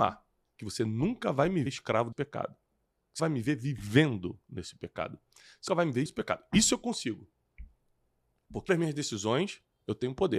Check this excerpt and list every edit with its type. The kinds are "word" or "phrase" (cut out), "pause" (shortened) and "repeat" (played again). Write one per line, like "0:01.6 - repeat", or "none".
0:01.7 - word
0:02.1 - word
0:03.2 - word
0:05.7 - word
0:06.1 - word
0:08.7 - word